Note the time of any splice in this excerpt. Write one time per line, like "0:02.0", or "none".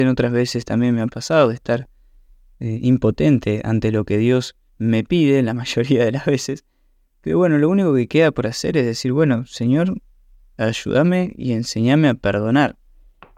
0:04.7